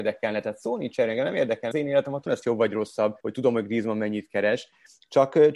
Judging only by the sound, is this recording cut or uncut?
cut